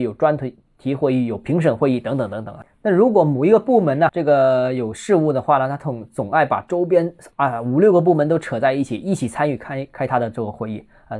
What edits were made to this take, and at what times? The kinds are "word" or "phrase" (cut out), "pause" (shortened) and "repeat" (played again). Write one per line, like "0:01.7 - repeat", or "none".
0:04.1 - word